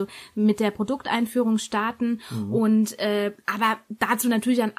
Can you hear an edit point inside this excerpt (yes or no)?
no